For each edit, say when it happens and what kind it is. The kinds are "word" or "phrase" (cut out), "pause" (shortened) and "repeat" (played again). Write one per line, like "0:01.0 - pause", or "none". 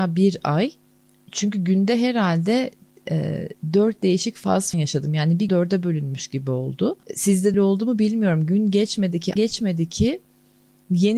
0:04.7 - word
0:05.5 - word
0:07.0 - pause
0:07.5 - word
0:09.4 - word